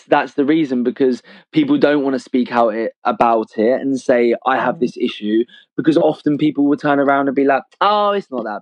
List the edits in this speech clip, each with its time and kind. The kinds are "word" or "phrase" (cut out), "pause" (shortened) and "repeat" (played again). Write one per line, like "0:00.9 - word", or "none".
none